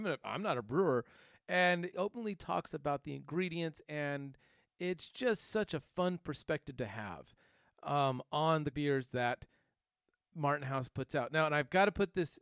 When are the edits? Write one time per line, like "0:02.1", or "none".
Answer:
0:01.9
0:08.7